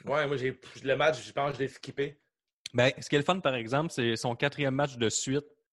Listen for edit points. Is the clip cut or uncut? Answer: uncut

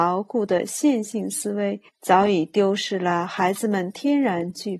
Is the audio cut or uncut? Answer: cut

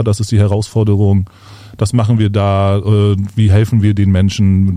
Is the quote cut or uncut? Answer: uncut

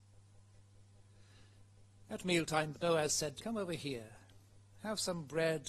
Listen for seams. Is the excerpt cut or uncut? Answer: cut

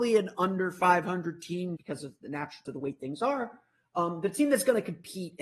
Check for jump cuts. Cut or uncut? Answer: cut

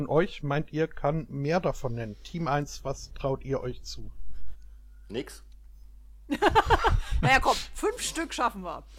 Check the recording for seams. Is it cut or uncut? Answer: uncut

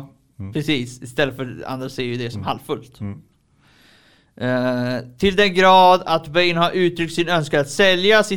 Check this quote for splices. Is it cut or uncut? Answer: uncut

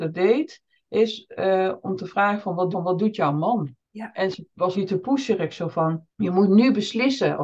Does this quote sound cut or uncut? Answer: cut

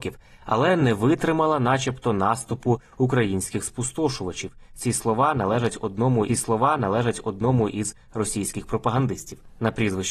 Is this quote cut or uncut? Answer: cut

